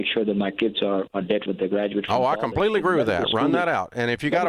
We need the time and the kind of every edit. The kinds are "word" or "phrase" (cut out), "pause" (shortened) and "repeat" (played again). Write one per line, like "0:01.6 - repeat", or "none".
0:01.5 - word